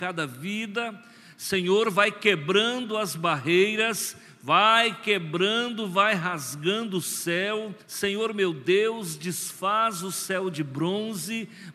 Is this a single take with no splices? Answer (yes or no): no